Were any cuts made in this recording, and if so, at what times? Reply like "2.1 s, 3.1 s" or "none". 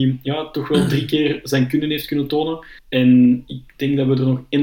2.8 s